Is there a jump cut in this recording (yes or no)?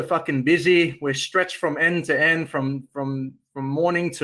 no